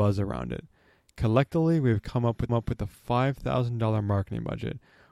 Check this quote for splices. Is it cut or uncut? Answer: cut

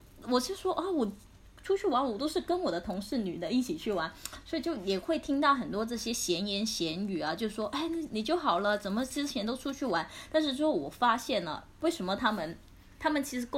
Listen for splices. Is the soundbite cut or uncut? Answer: uncut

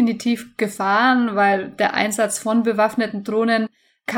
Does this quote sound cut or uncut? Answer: uncut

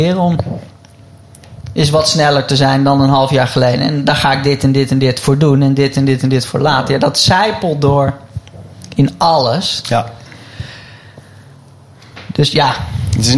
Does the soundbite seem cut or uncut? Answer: uncut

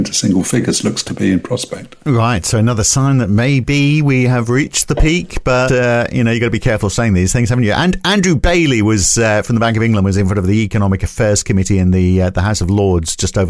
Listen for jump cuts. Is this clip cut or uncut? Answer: cut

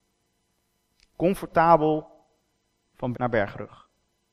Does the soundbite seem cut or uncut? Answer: cut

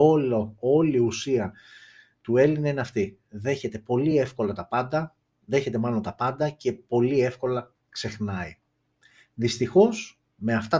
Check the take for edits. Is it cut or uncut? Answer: uncut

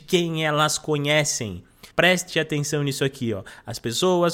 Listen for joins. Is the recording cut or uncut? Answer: cut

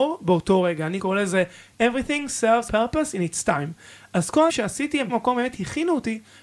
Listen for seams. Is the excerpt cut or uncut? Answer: cut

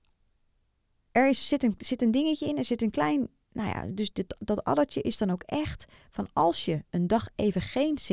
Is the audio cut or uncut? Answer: uncut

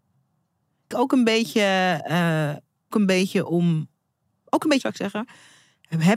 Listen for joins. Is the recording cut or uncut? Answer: cut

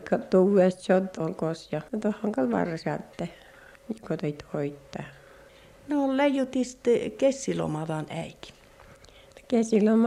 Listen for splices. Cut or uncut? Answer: cut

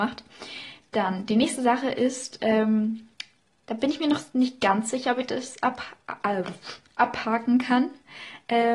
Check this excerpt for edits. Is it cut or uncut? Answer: uncut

